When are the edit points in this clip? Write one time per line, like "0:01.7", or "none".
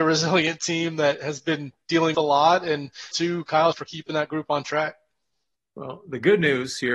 0:02.1
0:03.1
0:03.7